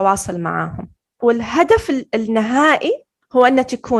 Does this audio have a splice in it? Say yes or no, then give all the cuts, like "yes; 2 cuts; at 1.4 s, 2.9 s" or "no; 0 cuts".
no; 0 cuts